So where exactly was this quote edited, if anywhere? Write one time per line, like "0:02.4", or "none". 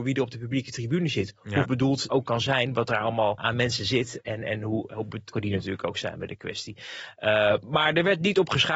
0:01.6
0:02.1
0:03.4
0:05.3

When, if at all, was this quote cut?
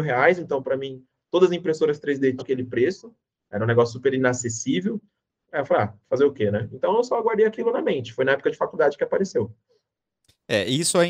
0:02.4

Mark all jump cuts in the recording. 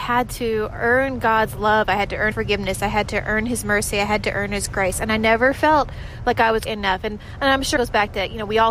0:02.3
0:06.7
0:07.8

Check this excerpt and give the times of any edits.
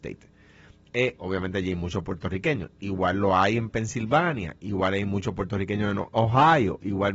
none

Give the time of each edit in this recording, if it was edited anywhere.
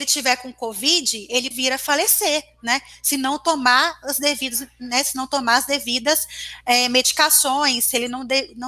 0:01.5

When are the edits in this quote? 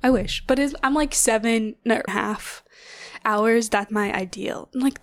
0:02.1
0:03.9

